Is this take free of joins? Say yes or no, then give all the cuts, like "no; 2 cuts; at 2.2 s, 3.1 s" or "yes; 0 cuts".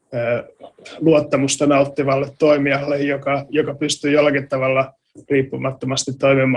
yes; 0 cuts